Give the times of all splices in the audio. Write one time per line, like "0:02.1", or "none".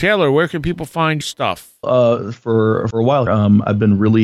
0:01.2
0:01.8
0:02.9
0:03.3